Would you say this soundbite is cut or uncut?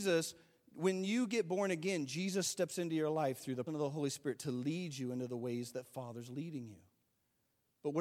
cut